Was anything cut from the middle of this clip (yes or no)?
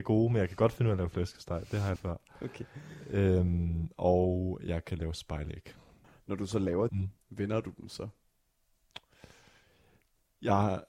yes